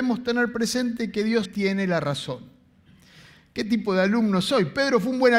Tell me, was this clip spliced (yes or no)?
yes